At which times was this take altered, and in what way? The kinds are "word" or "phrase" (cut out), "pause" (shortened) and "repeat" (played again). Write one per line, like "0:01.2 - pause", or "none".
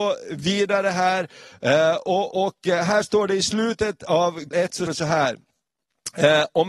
0:04.5 - word
0:04.9 - word